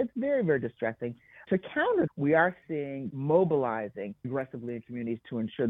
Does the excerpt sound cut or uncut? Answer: cut